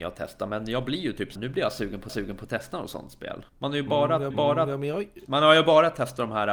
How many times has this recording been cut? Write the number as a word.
four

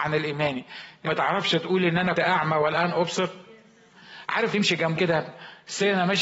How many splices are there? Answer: four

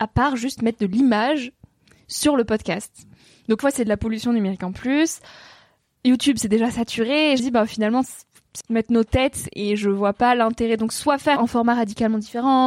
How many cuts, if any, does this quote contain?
four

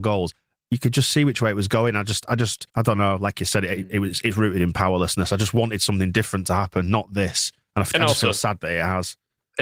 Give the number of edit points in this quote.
one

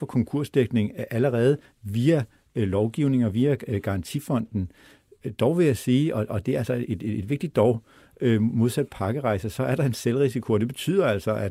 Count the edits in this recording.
zero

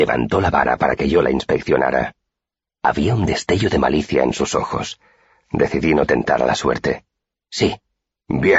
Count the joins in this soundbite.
zero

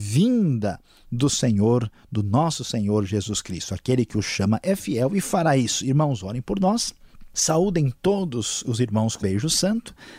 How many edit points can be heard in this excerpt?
one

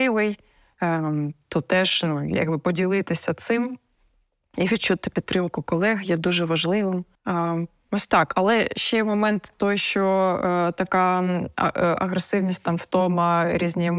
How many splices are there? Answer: one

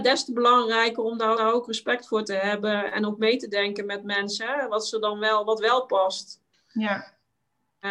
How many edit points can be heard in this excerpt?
three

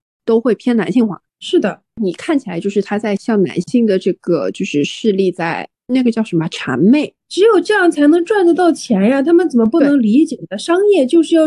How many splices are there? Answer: three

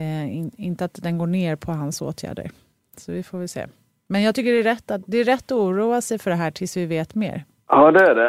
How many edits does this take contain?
zero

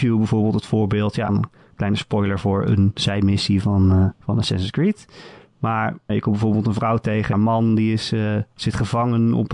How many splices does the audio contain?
four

